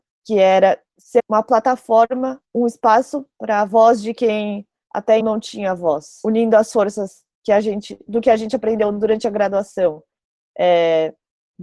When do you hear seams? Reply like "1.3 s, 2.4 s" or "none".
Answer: 1.2 s, 2.4 s, 5.2 s